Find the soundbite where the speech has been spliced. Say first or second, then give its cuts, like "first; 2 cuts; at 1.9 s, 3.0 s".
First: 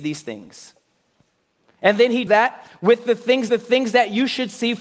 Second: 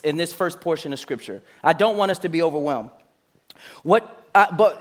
first; 2 cuts; at 2.3 s, 3.5 s